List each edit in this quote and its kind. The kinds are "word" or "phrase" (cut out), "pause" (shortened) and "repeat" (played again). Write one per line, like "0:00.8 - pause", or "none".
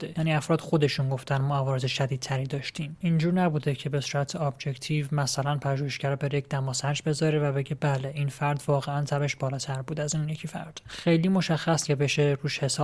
0:11.9 - word

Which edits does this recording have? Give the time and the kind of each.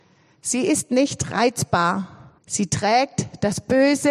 0:02.4 - pause

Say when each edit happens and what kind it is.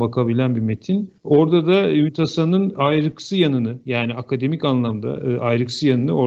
0:01.2 - pause

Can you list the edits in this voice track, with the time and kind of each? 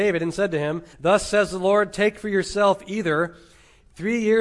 0:00.9 - pause

